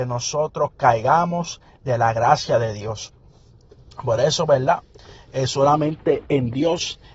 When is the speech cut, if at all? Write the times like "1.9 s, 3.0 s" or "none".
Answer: none